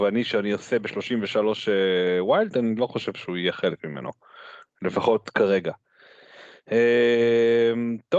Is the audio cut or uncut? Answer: uncut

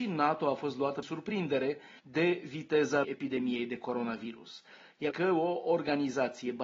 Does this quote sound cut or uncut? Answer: cut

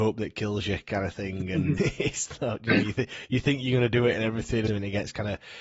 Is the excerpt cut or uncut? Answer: cut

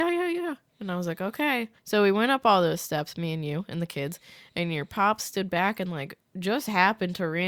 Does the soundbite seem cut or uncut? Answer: cut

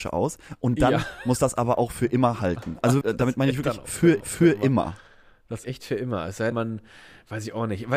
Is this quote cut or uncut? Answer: cut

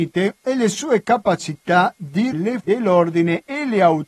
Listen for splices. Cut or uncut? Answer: cut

